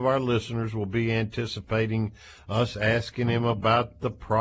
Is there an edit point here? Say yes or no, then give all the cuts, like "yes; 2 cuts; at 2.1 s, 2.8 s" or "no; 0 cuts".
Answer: no; 0 cuts